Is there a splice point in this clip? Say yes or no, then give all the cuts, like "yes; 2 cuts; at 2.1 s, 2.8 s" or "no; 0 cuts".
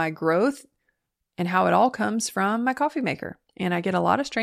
yes; 1 cut; at 3.5 s